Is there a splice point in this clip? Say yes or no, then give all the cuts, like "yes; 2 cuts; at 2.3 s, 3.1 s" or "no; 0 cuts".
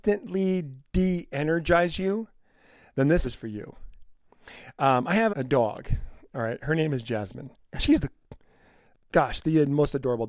yes; 2 cuts; at 3.2 s, 5.3 s